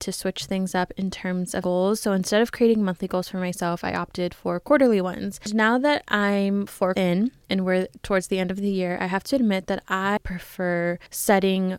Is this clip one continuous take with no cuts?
no; 3 cuts; at 1.6 s, 6.9 s, 10.2 s

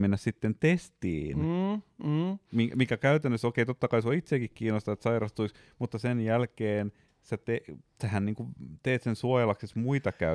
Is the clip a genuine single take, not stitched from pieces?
yes; 0 cuts

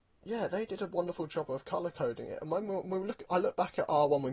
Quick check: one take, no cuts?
yes; 0 cuts

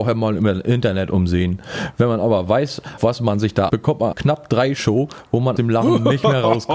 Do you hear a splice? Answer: yes; 5 cuts; at 3.0 s, 3.7 s, 4.1 s, 4.8 s, 5.6 s

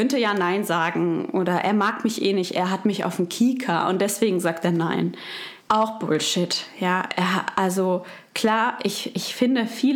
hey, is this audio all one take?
no; 2 cuts; at 5.6 s, 8.3 s

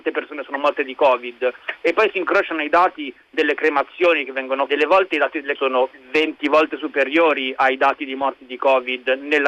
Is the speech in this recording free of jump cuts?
no; 2 cuts; at 4.7 s, 5.6 s

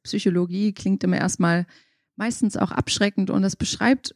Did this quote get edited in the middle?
no; 0 cuts

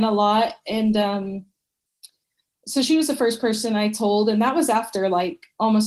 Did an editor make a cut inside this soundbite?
no; 0 cuts

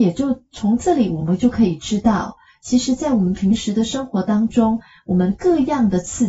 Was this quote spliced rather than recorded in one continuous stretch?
no; 0 cuts

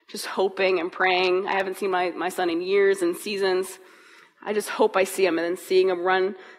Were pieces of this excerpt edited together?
no; 0 cuts

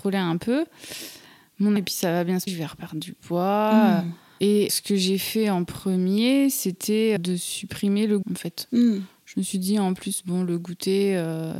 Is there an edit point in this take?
yes; 5 cuts; at 1.8 s, 2.5 s, 4.7 s, 7.2 s, 8.2 s

